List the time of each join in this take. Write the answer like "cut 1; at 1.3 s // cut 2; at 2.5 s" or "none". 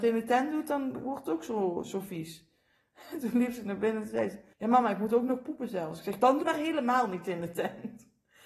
cut 1; at 4.5 s // cut 2; at 6.4 s